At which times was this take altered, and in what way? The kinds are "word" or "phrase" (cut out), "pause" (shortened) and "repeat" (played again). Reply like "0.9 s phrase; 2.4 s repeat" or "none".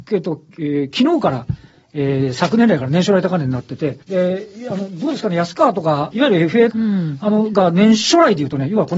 4.0 s pause; 6.1 s phrase; 6.7 s phrase